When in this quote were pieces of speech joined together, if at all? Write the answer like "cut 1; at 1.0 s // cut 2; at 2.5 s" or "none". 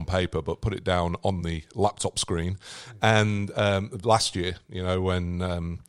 none